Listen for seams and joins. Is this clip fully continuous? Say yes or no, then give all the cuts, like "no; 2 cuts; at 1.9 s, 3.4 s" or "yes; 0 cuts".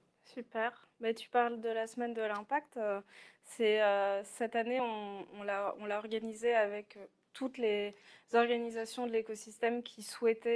yes; 0 cuts